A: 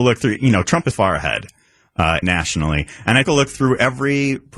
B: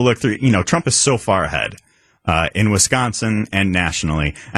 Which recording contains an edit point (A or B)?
A